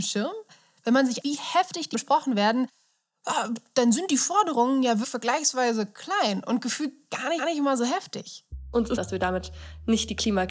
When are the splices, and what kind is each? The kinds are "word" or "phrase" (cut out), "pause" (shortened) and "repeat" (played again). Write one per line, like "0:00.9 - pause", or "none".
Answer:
0:01.2 - word
0:01.9 - word
0:05.0 - word
0:07.4 - repeat
0:09.0 - phrase

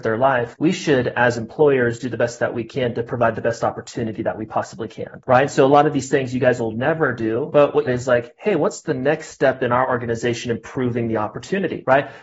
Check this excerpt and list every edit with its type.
0:07.9 - phrase

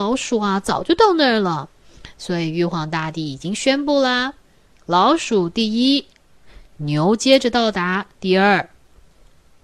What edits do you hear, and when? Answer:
none

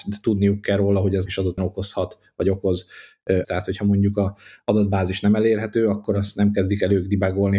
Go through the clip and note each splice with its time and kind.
0:01.3 - word
0:01.6 - word
0:03.4 - word

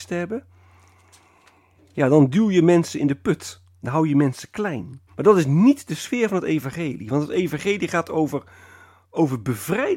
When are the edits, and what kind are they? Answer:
0:05.1 - pause

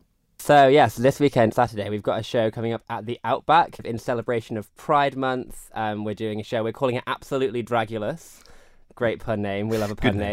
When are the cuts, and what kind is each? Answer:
0:01.5 - word
0:03.8 - word

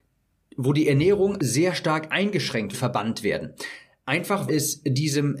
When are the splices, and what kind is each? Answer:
0:01.4 - word
0:02.7 - phrase
0:04.5 - word

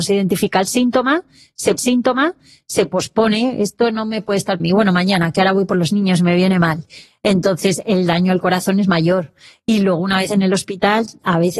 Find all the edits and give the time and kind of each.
0:01.8 - repeat
0:04.6 - phrase

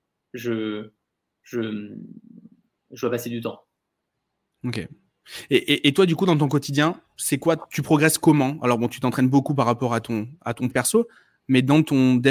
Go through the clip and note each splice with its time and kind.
0:10.7 - word

